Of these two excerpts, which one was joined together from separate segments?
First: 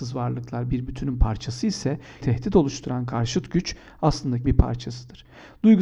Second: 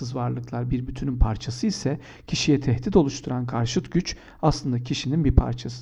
first; 2 cuts; at 2.2 s, 4.4 s

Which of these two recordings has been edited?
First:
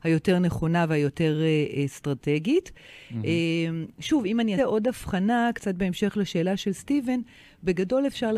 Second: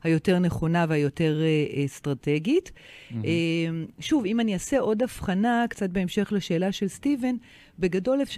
first; 1 cut; at 4.6 s

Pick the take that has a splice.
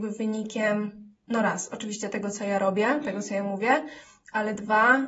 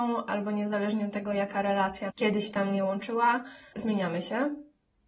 second; 2 cuts; at 2.1 s, 3.7 s

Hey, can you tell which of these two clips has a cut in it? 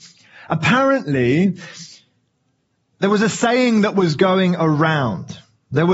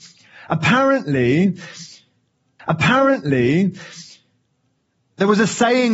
second; 1 cut; at 2.6 s

